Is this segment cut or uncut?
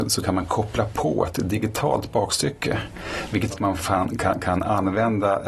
cut